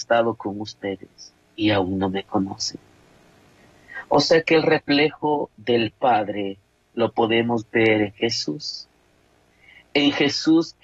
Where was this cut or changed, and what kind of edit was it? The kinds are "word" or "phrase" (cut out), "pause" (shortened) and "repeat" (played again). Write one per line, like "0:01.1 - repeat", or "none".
none